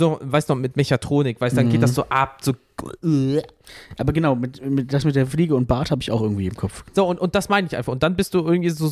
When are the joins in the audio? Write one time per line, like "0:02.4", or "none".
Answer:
none